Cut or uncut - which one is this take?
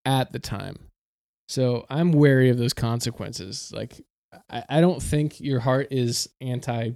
uncut